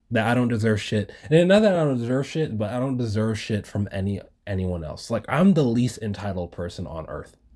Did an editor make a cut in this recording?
no; 0 cuts

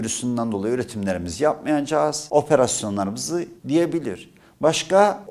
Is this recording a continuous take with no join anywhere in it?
no; 1 cut; at 3.6 s

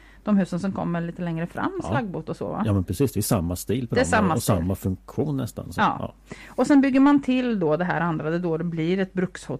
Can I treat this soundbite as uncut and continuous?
yes; 0 cuts

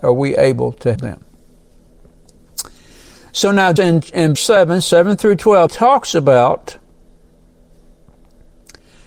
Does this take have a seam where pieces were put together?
yes; 4 cuts; at 0.9 s, 3.8 s, 4.3 s, 5.7 s

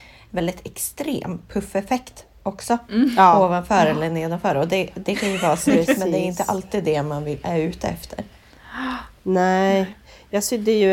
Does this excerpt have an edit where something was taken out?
no; 0 cuts

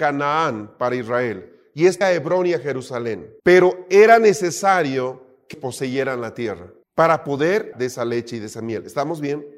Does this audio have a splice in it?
yes; 5 cuts; at 2.0 s, 3.4 s, 5.5 s, 6.8 s, 7.7 s

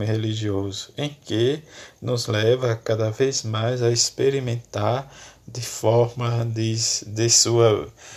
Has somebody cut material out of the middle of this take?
no; 0 cuts

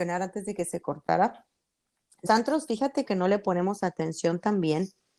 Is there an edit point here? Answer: yes; 2 cuts; at 2.3 s, 3.0 s

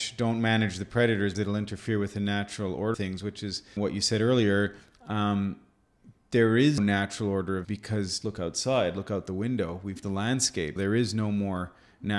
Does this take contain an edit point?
yes; 8 cuts; at 1.3 s, 2.9 s, 3.8 s, 6.8 s, 7.6 s, 8.2 s, 10.0 s, 10.8 s

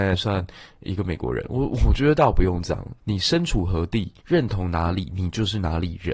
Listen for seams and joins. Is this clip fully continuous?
no; 2 cuts; at 3.0 s, 4.2 s

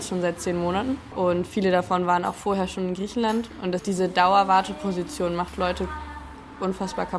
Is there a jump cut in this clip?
no; 0 cuts

